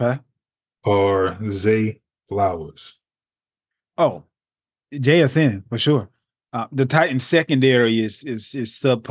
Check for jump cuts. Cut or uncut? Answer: uncut